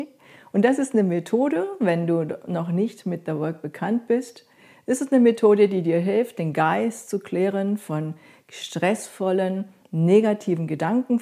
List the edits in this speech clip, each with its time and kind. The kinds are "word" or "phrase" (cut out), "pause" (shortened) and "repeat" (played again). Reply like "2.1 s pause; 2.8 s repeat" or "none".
none